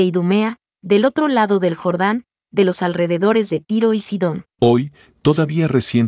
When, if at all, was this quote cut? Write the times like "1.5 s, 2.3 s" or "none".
4.5 s